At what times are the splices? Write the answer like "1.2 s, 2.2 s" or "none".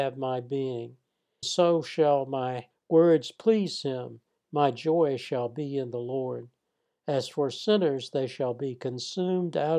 1.4 s, 2.7 s